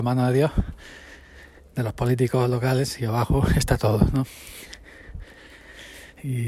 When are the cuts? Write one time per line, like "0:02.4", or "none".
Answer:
none

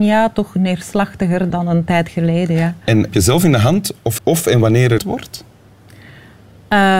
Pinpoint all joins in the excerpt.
0:01.5
0:03.1
0:04.2
0:05.0

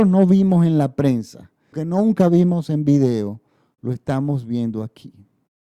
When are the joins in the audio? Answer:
0:01.7

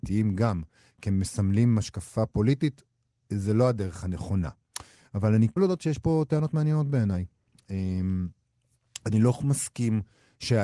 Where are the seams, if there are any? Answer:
0:05.6

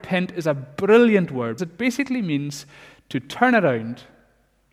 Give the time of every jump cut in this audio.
0:01.6

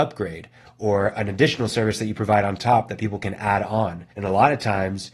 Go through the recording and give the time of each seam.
0:04.1

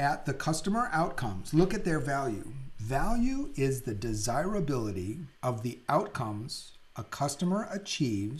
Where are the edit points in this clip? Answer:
0:05.4

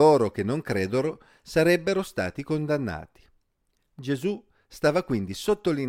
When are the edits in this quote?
none

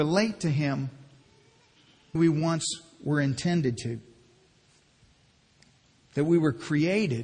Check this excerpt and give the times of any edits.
0:02.2

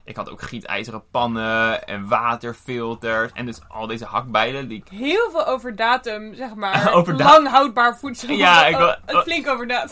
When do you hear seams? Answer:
none

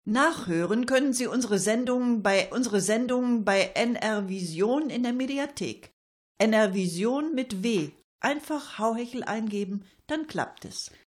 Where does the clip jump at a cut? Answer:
0:02.5

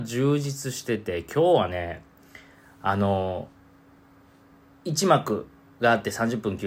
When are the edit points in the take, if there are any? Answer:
none

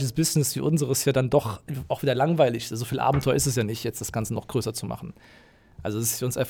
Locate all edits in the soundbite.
none

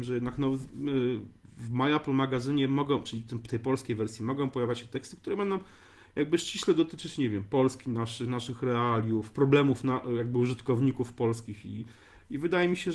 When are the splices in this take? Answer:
none

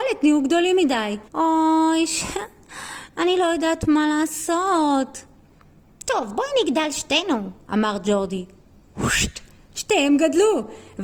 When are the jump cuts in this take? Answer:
0:01.3

